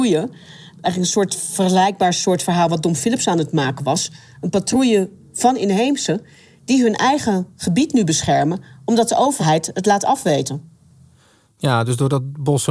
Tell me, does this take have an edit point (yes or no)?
no